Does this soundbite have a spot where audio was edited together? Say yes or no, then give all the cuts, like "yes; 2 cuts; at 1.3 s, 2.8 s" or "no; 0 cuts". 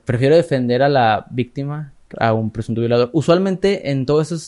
yes; 1 cut; at 2.1 s